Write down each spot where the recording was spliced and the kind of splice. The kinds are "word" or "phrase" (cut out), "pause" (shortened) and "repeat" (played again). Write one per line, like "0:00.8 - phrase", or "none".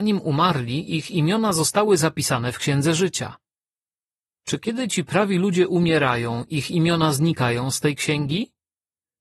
none

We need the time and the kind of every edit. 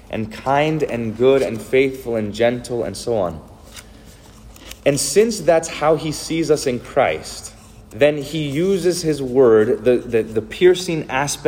0:07.8 - pause

